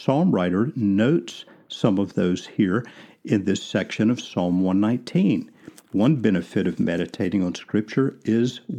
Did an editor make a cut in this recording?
no; 0 cuts

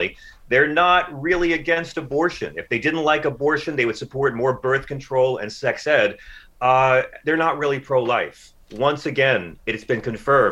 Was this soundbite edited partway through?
no; 0 cuts

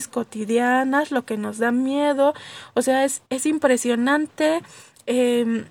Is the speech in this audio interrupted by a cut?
yes; 1 cut; at 3.3 s

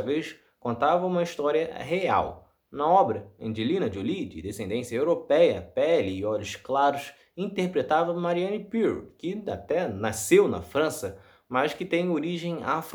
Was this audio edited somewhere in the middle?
no; 0 cuts

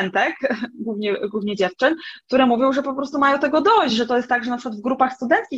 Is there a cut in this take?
no; 0 cuts

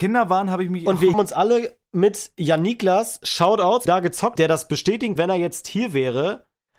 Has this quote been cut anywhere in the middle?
yes; 4 cuts; at 1.1 s, 3.9 s, 4.4 s, 5.2 s

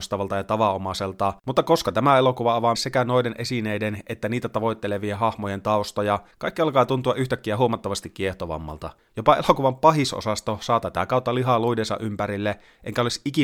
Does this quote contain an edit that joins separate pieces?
yes; 3 cuts; at 1.4 s, 2.7 s, 6.3 s

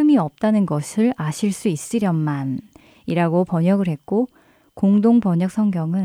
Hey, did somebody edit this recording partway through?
no; 0 cuts

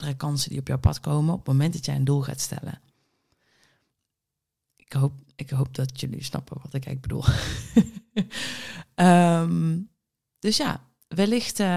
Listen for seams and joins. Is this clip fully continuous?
yes; 0 cuts

